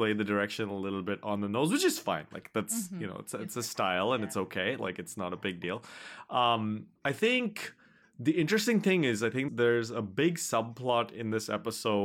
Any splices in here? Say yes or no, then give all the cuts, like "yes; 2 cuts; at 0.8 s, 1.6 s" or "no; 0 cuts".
yes; 2 cuts; at 7.0 s, 9.5 s